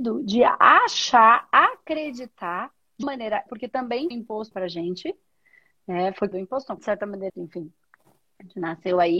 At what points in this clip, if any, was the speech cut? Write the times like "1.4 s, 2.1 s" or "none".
3.0 s, 3.5 s, 4.1 s, 4.5 s, 6.3 s, 6.8 s, 7.3 s

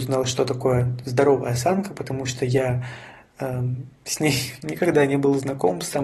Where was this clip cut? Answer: none

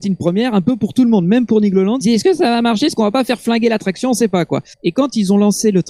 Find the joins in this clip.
2.0 s, 4.7 s

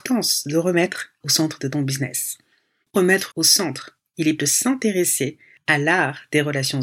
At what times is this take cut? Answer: 1.2 s, 2.9 s, 3.3 s, 4.4 s

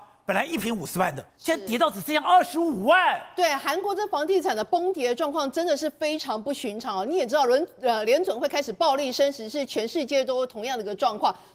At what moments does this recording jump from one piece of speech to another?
1.3 s

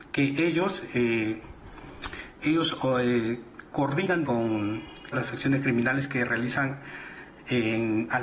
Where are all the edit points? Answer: 2.4 s, 4.2 s, 5.1 s

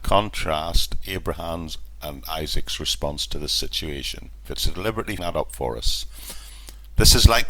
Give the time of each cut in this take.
5.2 s

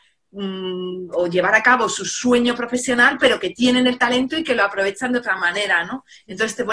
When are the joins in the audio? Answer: none

